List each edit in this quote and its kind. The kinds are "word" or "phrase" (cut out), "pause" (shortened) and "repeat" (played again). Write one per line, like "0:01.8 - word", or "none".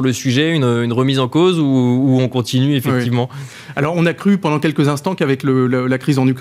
none